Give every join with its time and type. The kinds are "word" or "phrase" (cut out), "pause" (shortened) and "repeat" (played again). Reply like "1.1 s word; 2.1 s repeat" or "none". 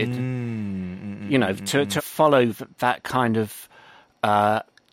2.0 s word

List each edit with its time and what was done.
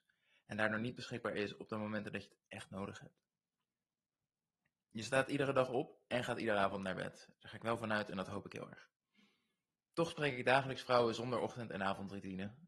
none

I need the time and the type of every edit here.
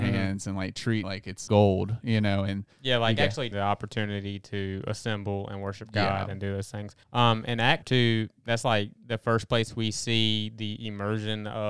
1.0 s word; 1.5 s word; 3.5 s phrase; 7.0 s pause; 7.8 s word

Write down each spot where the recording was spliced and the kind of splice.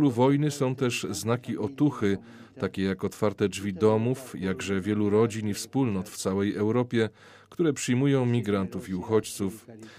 none

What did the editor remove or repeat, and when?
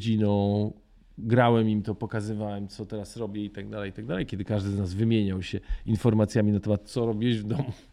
none

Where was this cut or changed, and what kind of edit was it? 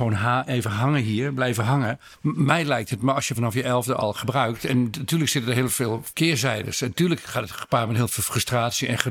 none

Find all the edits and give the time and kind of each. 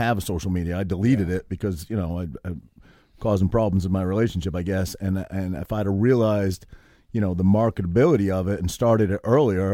none

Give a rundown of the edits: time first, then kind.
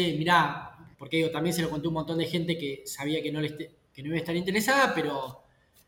0.9 s pause

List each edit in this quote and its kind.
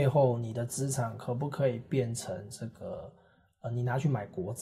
none

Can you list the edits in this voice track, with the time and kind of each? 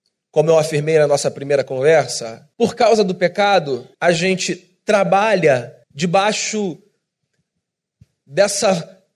2.5 s pause; 3.9 s pause; 5.8 s pause

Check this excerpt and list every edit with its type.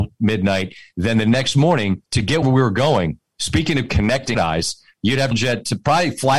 2.1 s pause; 2.4 s word; 4.3 s word; 5.3 s phrase

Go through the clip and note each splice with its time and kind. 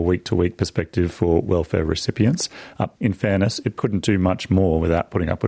2.9 s word; 3.8 s word

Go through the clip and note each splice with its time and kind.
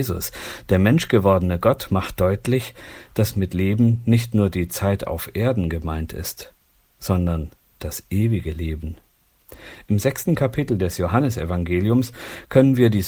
none

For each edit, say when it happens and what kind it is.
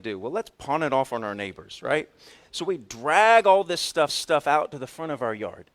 4.1 s repeat

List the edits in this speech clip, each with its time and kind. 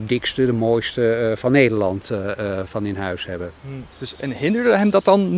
2.7 s word; 3.9 s pause

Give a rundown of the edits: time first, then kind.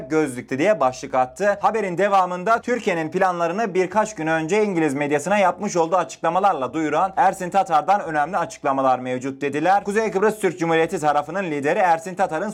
none

